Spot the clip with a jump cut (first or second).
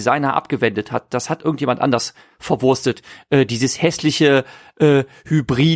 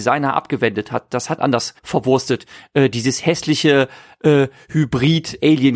second